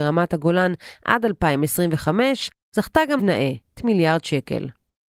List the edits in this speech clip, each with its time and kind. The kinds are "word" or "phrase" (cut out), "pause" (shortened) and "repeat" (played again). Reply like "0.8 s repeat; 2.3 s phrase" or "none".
3.2 s word; 3.8 s word